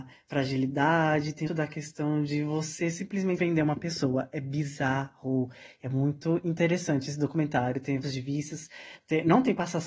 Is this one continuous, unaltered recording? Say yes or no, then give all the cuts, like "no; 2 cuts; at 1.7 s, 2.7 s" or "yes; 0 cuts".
no; 3 cuts; at 1.5 s, 3.4 s, 8.0 s